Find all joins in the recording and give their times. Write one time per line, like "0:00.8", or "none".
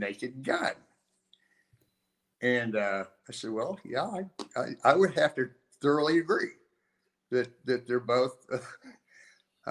none